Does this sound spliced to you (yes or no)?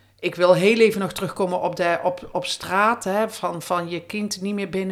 no